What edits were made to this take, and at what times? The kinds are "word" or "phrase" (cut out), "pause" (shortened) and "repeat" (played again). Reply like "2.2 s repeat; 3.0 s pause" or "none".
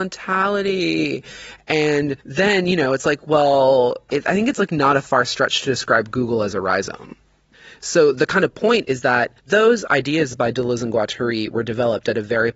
2.2 s pause; 9.4 s pause

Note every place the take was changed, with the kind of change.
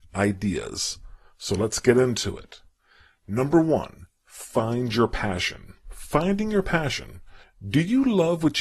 none

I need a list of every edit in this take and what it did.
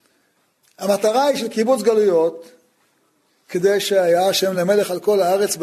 none

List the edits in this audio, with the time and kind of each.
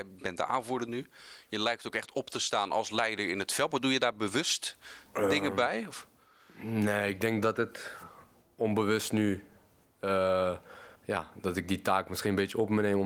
10.9 s pause

